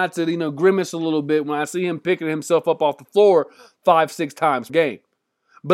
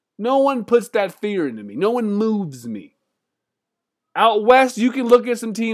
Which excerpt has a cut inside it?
first; 1 cut; at 4.7 s

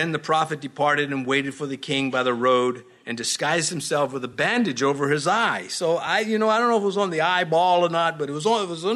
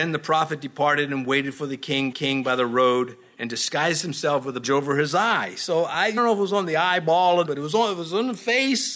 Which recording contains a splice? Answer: second; 4 cuts; at 2.1 s, 4.6 s, 6.2 s, 7.4 s

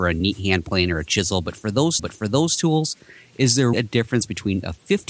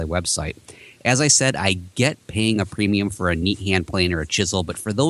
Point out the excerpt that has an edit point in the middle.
first; 2 cuts; at 2.0 s, 3.7 s

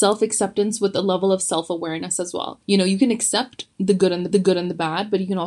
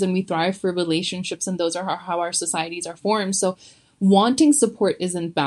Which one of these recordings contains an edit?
first; 2 cuts; at 2.6 s, 4.3 s

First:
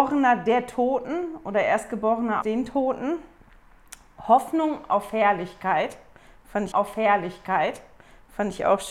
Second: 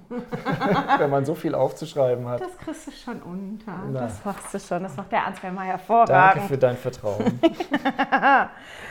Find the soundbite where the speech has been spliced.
first; 2 cuts; at 2.4 s, 6.7 s

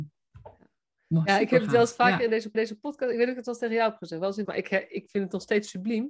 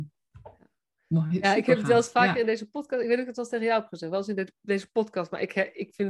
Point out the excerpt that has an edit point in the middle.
first; 3 cuts; at 1.3 s, 2.5 s, 4.4 s

